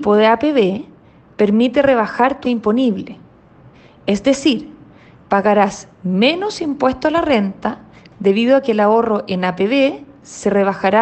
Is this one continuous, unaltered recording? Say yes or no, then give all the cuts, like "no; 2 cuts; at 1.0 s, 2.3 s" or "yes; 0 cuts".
no; 1 cut; at 2.4 s